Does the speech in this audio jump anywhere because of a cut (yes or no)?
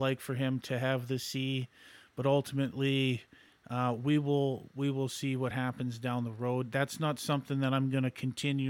no